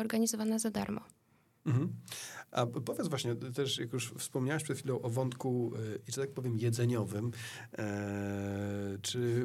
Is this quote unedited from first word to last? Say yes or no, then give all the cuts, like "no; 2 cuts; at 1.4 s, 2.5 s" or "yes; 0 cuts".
yes; 0 cuts